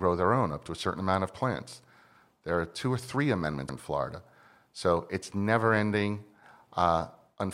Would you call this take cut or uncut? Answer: cut